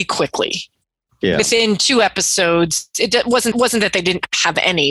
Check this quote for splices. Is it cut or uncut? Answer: cut